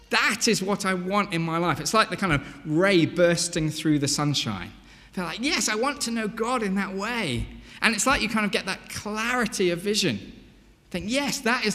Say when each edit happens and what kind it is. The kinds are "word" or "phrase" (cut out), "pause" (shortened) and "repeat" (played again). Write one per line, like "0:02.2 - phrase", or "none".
none